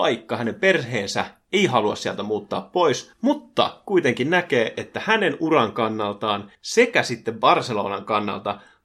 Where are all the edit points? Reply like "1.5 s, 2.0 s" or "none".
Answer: 3.1 s, 6.5 s